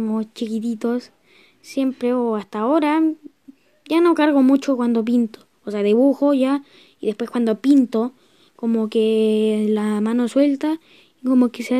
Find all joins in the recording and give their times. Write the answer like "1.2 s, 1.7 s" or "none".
none

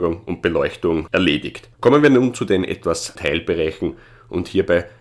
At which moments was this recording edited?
1.1 s, 1.7 s, 3.2 s

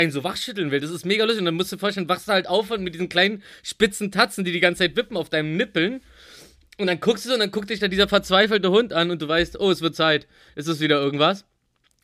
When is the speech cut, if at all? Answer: none

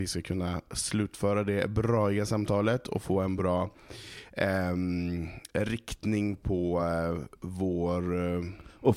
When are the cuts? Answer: none

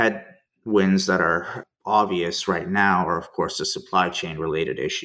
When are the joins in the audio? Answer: none

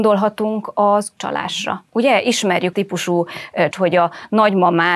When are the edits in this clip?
1.2 s, 1.9 s, 2.7 s, 3.7 s

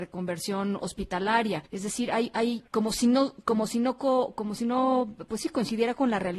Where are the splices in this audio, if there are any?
1.7 s, 2.7 s

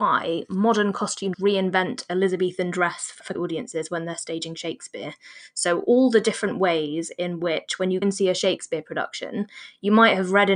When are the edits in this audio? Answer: 1.3 s, 3.3 s, 8.0 s

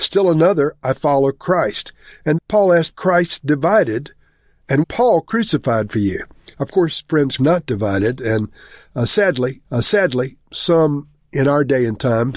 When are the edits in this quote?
2.4 s, 2.9 s, 4.8 s, 6.5 s, 7.4 s, 9.6 s

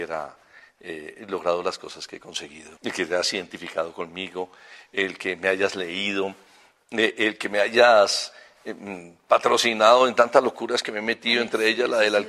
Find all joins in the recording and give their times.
2.8 s

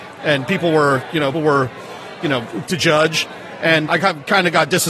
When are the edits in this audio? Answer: 1.3 s, 2.7 s, 3.9 s

